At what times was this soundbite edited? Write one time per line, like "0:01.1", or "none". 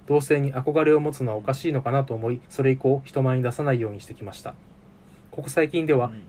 0:02.5

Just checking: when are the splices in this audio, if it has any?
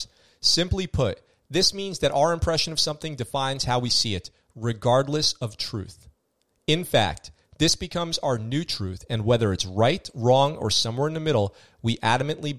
none

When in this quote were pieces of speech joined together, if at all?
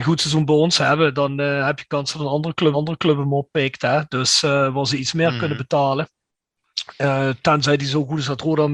0:02.7

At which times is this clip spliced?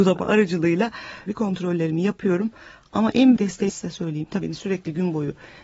0:01.3
0:03.4
0:03.7
0:04.4

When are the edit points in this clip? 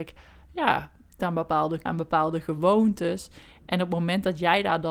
0:01.2
0:01.9

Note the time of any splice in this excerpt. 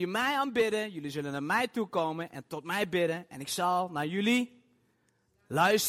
none

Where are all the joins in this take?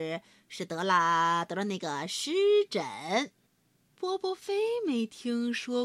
0:03.3

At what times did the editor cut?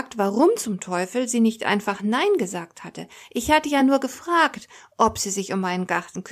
none

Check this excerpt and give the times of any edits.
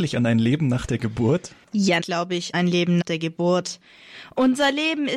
0:02.0
0:02.5
0:03.0

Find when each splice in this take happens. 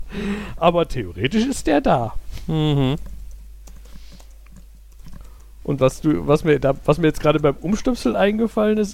none

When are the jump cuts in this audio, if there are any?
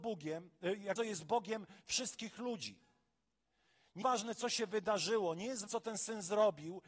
0:01.0
0:04.0
0:05.7

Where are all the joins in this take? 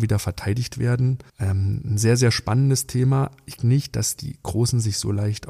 0:01.3
0:03.6

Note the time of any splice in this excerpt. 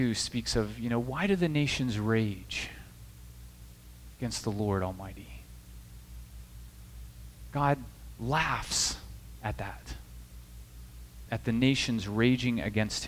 0:11.3

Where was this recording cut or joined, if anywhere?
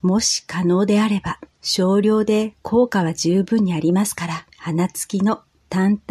0:01.5
0:04.5

